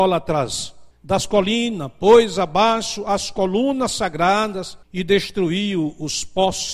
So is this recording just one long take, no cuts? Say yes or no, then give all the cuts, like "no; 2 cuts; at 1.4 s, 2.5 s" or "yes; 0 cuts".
no; 2 cuts; at 0.9 s, 4.8 s